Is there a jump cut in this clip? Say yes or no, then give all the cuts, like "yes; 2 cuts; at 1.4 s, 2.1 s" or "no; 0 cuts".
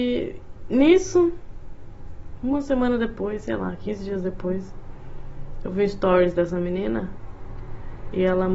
no; 0 cuts